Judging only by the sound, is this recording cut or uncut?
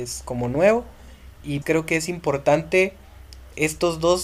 cut